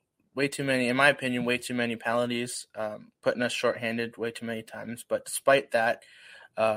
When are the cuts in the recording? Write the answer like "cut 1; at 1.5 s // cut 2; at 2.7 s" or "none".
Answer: cut 1; at 3.2 s